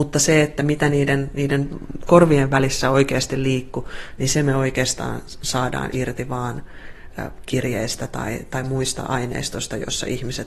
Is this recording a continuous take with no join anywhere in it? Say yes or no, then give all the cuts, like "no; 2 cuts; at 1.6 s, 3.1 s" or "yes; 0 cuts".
yes; 0 cuts